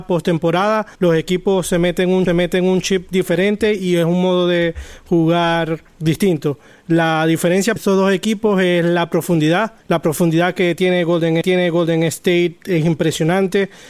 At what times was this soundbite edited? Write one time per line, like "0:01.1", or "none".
0:01.0
0:02.3
0:05.9
0:07.8
0:09.8
0:11.4